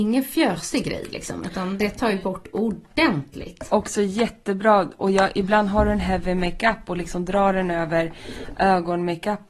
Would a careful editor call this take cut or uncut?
uncut